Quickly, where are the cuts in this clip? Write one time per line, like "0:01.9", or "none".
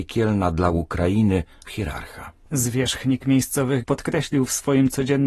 0:01.7
0:03.8